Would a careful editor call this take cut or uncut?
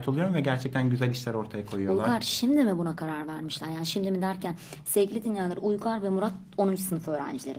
uncut